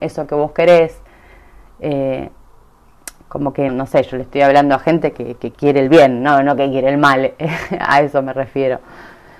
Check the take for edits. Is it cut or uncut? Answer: cut